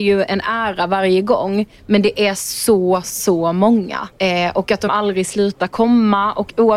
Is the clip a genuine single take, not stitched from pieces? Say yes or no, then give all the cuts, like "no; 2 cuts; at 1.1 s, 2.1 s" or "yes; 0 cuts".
no; 3 cuts; at 3.0 s, 4.1 s, 4.9 s